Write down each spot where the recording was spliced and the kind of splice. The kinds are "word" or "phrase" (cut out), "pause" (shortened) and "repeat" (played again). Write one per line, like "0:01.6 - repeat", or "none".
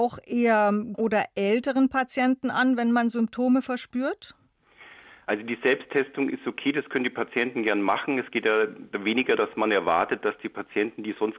0:00.9 - word
0:09.4 - word